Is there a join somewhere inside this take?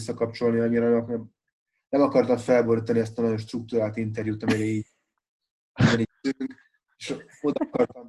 yes; 1 cut; at 6.0 s

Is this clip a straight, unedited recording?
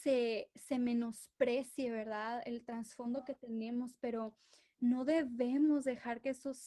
yes; 0 cuts

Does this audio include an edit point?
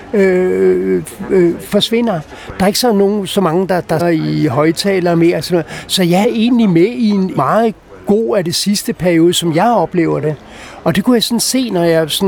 yes; 3 cuts; at 4.0 s, 6.2 s, 7.4 s

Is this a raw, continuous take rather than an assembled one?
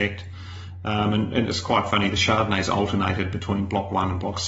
yes; 0 cuts

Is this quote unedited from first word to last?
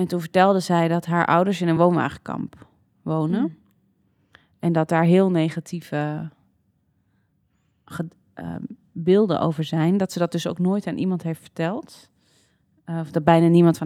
yes; 0 cuts

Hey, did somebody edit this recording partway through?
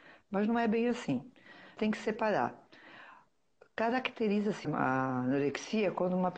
yes; 2 cuts; at 1.8 s, 4.6 s

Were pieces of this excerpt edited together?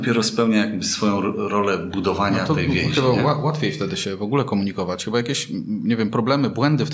no; 0 cuts

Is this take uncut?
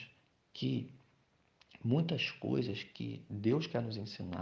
yes; 0 cuts

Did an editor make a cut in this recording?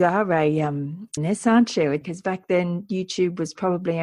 yes; 2 cuts; at 1.2 s, 2.0 s

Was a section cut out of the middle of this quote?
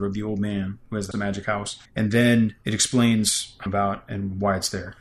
yes; 4 cuts; at 1.1 s, 1.9 s, 2.6 s, 3.7 s

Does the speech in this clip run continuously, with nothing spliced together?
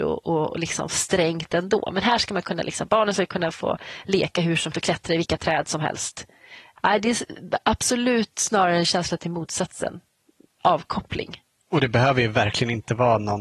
no; 2 cuts; at 4.7 s, 11.6 s

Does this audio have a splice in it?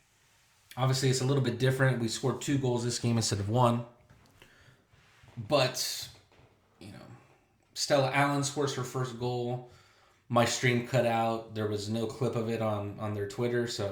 no; 0 cuts

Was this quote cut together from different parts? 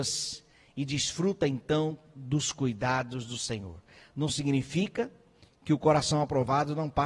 no; 0 cuts

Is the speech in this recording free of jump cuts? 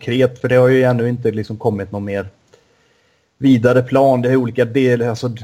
yes; 0 cuts

